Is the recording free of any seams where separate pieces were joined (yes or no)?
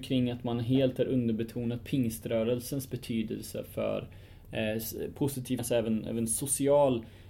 no